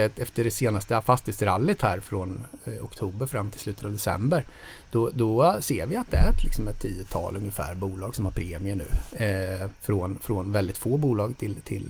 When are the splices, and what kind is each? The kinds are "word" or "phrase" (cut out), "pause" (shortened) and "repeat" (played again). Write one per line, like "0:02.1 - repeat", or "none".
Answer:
0:09.8 - pause